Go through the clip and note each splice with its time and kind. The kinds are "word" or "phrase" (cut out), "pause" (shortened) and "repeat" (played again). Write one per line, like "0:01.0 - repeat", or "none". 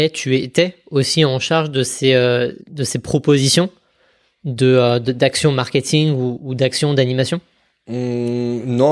0:02.6 - pause